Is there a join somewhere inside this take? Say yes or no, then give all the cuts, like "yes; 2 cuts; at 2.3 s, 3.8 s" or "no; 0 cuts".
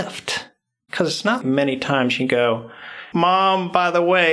yes; 2 cuts; at 1.4 s, 3.1 s